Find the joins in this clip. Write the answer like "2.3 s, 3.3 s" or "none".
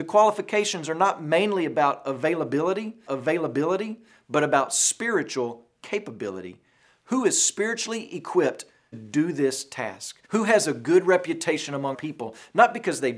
3.1 s, 8.9 s, 10.2 s, 11.9 s